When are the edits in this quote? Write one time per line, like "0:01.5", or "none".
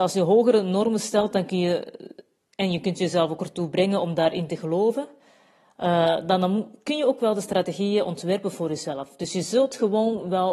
none